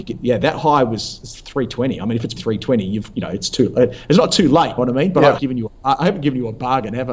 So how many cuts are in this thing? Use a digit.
4